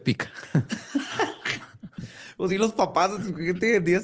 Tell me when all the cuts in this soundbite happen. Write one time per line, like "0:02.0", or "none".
none